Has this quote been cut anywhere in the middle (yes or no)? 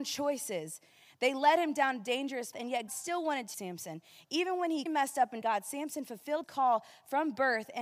yes